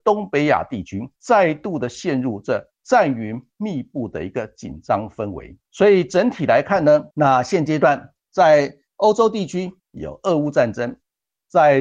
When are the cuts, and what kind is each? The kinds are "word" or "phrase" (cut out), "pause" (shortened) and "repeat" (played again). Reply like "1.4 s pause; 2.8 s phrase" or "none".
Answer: 1.2 s pause; 5.6 s pause; 7.1 s pause; 9.8 s pause